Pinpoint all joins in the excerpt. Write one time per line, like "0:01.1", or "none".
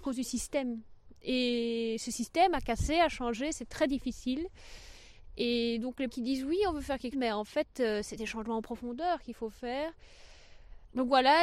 0:06.1
0:07.1